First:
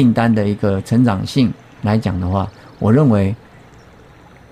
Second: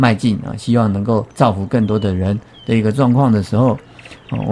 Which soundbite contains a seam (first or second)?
second